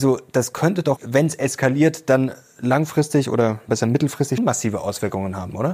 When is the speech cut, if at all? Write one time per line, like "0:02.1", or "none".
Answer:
0:01.0
0:03.7
0:04.4